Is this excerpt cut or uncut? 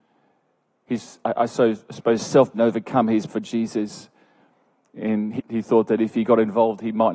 cut